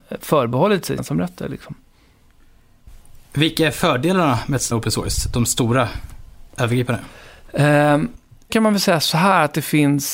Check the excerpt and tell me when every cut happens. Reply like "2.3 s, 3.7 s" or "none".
1.0 s, 4.7 s, 8.5 s